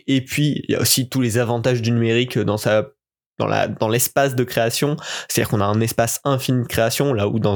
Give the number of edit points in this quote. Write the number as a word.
zero